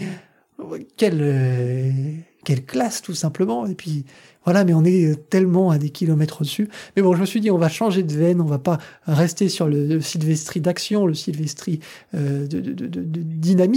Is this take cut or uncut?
uncut